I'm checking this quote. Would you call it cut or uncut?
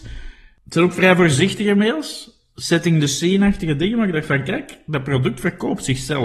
uncut